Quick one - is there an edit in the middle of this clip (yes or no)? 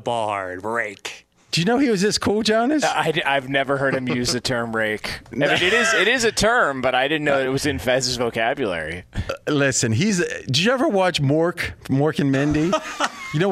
no